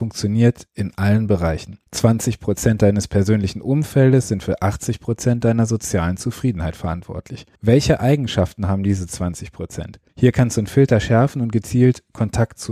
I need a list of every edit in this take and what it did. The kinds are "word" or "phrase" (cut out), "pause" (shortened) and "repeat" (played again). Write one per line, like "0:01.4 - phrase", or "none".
0:01.9 - pause
0:07.5 - pause
0:10.1 - pause